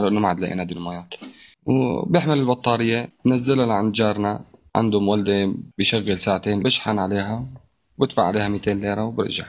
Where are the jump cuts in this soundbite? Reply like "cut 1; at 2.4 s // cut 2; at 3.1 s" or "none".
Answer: cut 1; at 6.6 s

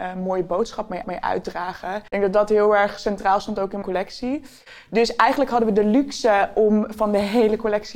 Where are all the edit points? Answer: cut 1; at 1.0 s // cut 2; at 2.1 s // cut 3; at 3.8 s

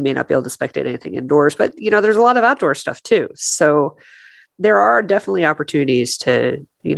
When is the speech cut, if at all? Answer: none

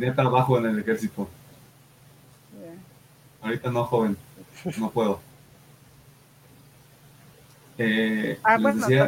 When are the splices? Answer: none

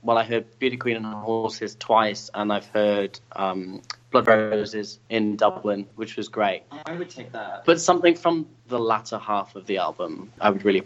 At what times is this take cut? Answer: none

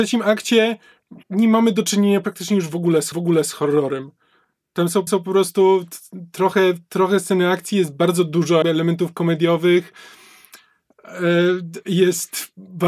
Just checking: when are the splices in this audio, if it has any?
cut 1; at 1.2 s // cut 2; at 3.1 s // cut 3; at 5.1 s // cut 4; at 8.6 s

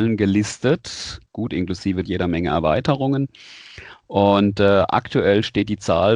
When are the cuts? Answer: cut 1; at 1.3 s // cut 2; at 2.0 s

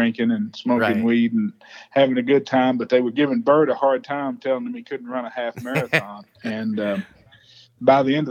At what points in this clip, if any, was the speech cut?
none

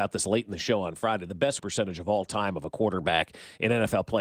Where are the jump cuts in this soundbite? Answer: cut 1; at 1.6 s

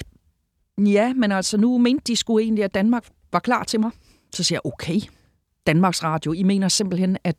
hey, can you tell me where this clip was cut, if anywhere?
none

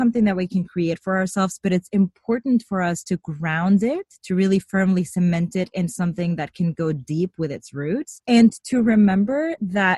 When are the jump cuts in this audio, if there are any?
none

